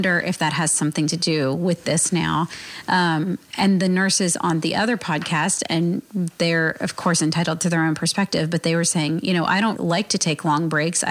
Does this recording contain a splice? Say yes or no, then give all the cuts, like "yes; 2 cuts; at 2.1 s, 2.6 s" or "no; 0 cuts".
yes; 1 cut; at 9.8 s